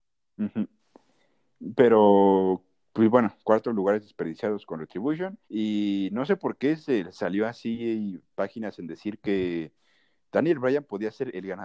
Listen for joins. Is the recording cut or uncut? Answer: cut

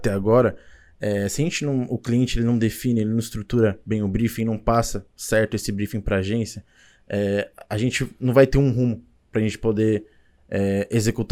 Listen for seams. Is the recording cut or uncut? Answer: uncut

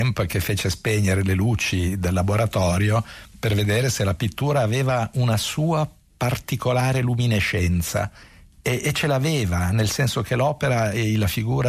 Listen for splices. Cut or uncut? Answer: uncut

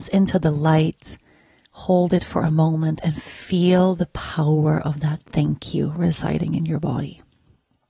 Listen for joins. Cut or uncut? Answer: uncut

